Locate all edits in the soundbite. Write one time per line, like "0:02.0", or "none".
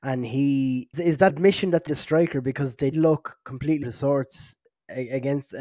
0:00.9
0:01.3
0:01.9
0:02.9
0:03.8